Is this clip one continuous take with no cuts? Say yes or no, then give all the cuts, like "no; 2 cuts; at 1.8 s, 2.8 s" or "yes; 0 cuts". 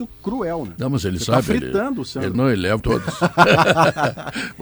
no; 2 cuts; at 2.3 s, 2.8 s